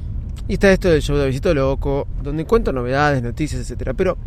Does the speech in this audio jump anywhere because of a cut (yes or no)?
no